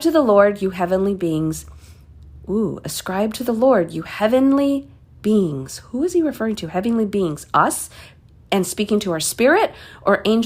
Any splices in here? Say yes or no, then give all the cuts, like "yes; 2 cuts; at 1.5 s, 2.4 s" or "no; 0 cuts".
no; 0 cuts